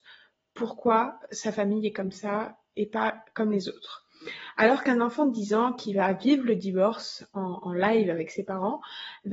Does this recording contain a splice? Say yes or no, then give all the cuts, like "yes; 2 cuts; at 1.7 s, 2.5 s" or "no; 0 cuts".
no; 0 cuts